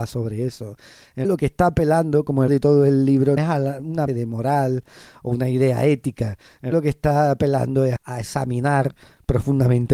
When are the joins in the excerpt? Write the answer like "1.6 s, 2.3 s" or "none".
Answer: 1.2 s, 2.5 s, 3.4 s, 4.1 s, 6.7 s, 8.0 s